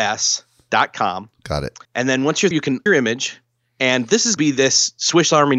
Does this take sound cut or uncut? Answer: cut